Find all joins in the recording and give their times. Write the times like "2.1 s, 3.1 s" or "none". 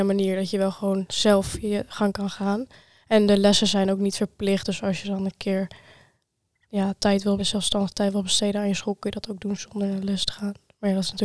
7.0 s, 7.4 s